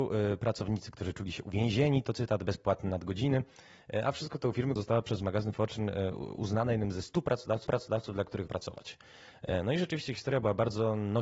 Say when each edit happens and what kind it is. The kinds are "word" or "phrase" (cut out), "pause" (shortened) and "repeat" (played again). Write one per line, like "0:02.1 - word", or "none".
0:04.8 - phrase
0:07.7 - repeat
0:08.5 - word